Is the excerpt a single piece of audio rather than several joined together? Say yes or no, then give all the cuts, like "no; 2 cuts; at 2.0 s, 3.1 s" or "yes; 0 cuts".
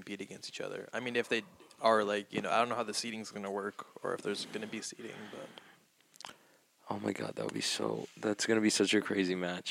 yes; 0 cuts